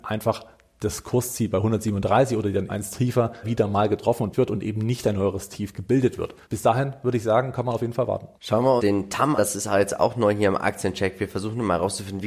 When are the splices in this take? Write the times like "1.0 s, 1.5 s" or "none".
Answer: 2.7 s, 3.4 s, 4.3 s, 6.4 s, 8.4 s, 8.8 s, 9.4 s

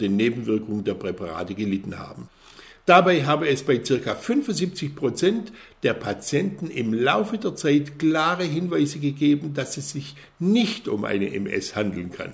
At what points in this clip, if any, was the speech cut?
none

